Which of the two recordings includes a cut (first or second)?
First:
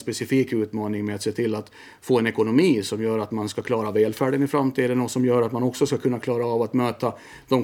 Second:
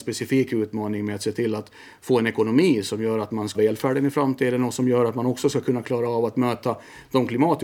second